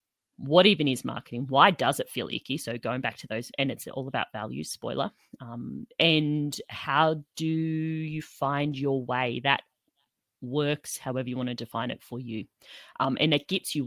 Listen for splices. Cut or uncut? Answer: uncut